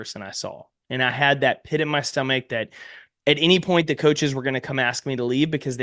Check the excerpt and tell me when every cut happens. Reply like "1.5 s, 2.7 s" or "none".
none